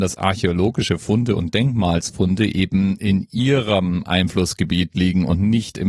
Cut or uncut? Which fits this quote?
uncut